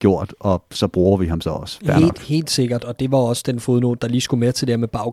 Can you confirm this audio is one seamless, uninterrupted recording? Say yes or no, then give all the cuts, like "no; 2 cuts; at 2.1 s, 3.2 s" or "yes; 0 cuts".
no; 1 cut; at 2.8 s